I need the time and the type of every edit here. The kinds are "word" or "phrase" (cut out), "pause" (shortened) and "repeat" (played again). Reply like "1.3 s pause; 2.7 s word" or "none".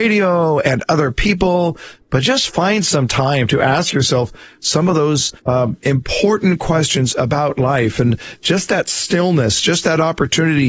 5.4 s pause